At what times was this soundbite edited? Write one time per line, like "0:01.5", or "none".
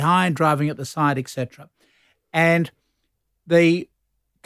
none